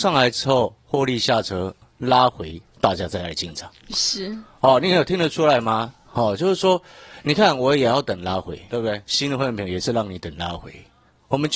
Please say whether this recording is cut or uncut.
cut